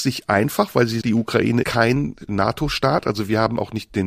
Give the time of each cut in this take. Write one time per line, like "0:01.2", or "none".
0:01.0
0:01.6
0:02.3